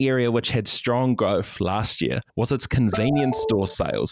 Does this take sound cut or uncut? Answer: cut